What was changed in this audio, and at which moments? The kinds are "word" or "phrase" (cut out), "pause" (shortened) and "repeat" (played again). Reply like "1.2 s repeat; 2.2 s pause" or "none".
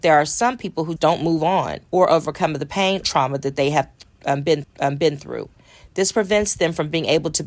1.0 s word; 1.8 s pause; 3.0 s word; 4.6 s repeat

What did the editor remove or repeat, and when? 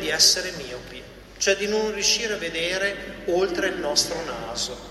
none

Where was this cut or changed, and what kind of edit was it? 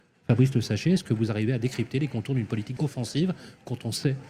2.8 s phrase

